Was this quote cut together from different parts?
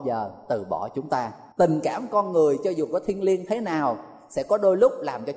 yes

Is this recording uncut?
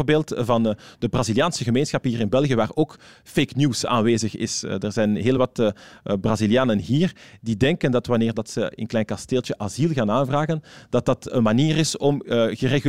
yes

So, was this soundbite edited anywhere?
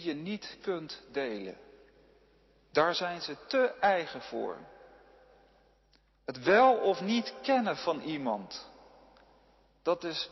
no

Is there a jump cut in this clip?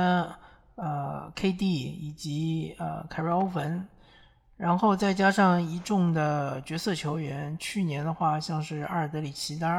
no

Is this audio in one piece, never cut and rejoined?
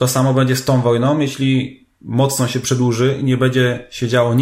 yes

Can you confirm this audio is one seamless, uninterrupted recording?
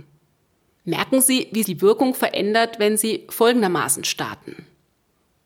no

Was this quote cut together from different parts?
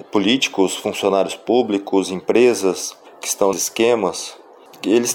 yes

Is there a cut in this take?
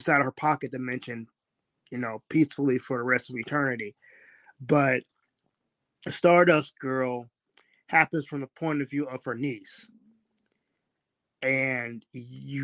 no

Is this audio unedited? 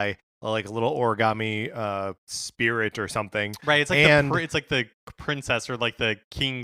no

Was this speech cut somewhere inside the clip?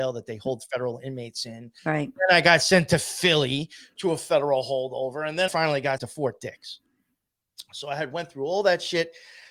yes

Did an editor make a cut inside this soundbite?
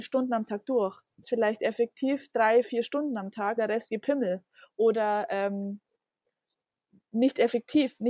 yes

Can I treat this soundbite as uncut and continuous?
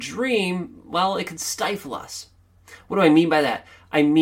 yes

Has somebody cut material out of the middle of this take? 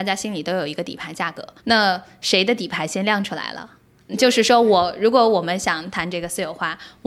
yes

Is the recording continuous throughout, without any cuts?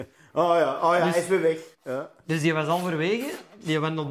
no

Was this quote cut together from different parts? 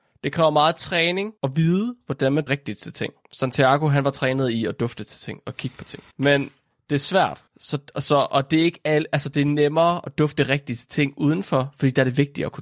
yes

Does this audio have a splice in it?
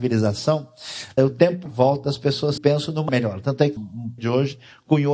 yes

